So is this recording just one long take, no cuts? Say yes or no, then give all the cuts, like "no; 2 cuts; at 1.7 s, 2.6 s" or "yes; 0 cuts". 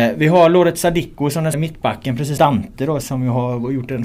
no; 3 cuts; at 1.5 s, 2.4 s, 3.0 s